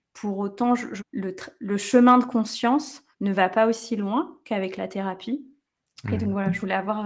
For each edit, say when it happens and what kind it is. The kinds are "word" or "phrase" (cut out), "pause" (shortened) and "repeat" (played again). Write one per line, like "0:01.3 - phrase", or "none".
0:01.0 - phrase
0:03.1 - pause